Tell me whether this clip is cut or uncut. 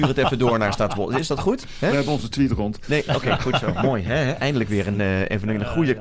uncut